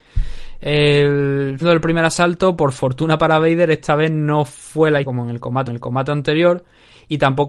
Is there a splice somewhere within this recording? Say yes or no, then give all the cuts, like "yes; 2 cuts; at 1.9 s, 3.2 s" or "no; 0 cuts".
yes; 3 cuts; at 1.6 s, 5.0 s, 5.7 s